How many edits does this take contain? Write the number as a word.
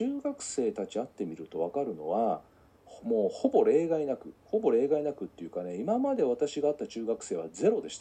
zero